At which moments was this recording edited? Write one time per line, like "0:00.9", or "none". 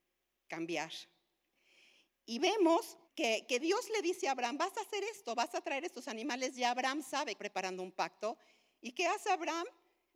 0:03.0
0:07.4